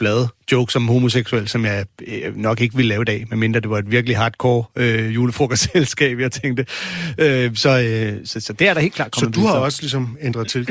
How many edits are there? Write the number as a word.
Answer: zero